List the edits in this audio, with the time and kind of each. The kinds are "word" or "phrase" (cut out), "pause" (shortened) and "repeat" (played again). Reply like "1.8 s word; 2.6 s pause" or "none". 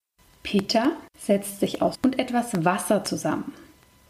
1.1 s pause; 1.9 s word